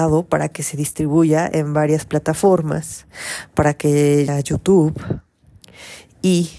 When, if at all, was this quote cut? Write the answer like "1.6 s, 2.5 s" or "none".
4.3 s